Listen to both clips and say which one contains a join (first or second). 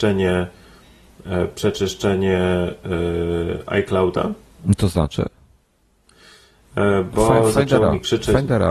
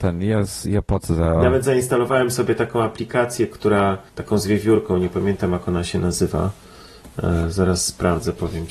second